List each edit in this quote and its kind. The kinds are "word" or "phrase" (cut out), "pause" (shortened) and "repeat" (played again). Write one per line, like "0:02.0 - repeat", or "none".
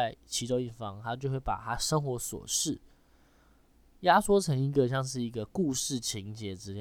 none